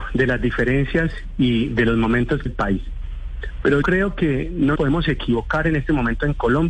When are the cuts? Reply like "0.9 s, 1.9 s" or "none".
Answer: 2.5 s, 3.8 s, 4.8 s